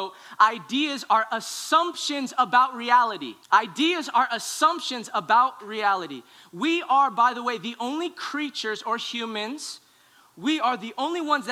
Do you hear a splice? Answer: yes; 1 cut; at 3.4 s

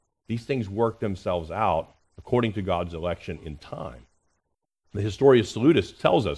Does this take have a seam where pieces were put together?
no; 0 cuts

